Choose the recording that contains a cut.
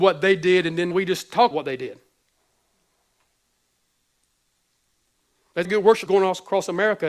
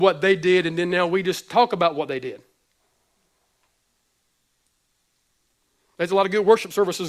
first; 4 cuts; at 0.9 s, 1.5 s, 5.6 s, 6.1 s

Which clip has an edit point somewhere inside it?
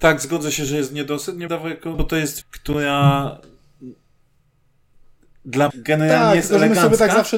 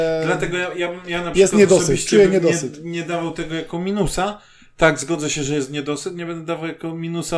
first; 4 cuts; at 1.5 s, 1.9 s, 2.4 s, 5.7 s

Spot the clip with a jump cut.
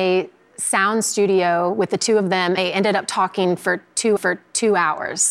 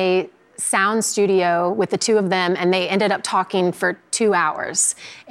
first; 2 cuts; at 2.6 s, 4.2 s

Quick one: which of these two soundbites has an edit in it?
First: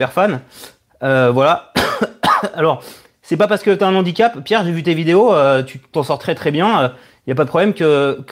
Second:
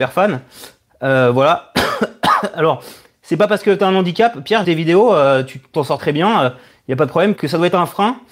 second; 3 cuts; at 4.6 s, 6.0 s, 7.4 s

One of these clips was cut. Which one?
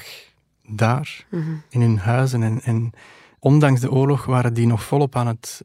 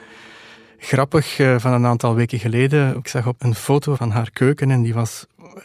second; 2 cuts; at 3.4 s, 4.0 s

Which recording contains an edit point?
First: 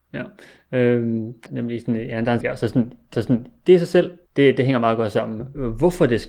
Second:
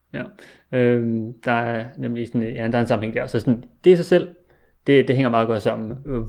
first; 4 cuts; at 1.5 s, 2.4 s, 3.1 s, 4.3 s

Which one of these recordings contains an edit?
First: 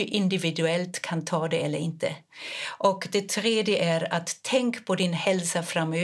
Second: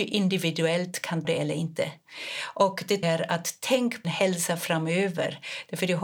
second; 3 cuts; at 1.2 s, 3.0 s, 4.0 s

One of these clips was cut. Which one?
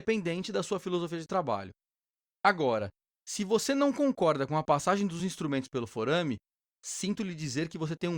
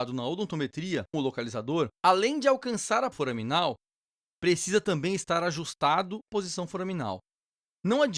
second; 4 cuts; at 1.1 s, 1.9 s, 3.1 s, 6.3 s

